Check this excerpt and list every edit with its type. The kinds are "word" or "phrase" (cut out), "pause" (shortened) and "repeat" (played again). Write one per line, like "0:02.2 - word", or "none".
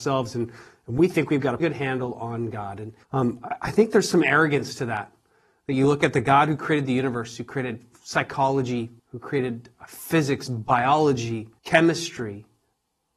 0:01.6 - word
0:03.0 - pause
0:09.0 - pause
0:11.6 - pause